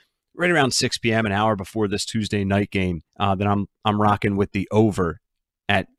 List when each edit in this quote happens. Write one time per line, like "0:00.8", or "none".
0:03.1